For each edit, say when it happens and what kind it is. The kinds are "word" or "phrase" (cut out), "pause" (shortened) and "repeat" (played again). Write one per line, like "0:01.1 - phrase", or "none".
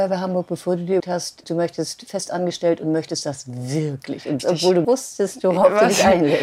0:01.0 - word
0:01.4 - word
0:04.4 - word
0:04.8 - phrase